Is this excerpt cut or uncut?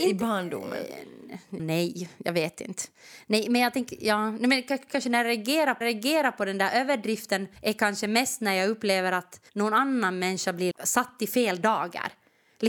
cut